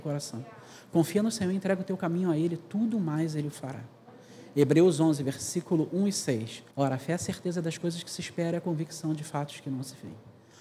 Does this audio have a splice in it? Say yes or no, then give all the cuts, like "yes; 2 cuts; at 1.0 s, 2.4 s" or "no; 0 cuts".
yes; 1 cut; at 6.7 s